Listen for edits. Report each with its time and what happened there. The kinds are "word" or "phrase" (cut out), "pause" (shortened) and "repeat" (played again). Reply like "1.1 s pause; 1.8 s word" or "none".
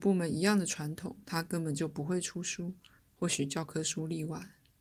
3.0 s pause